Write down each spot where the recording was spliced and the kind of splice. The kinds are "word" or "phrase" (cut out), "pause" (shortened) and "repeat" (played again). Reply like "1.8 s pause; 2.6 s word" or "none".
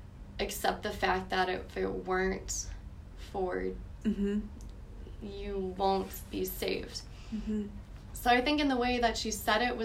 4.0 s word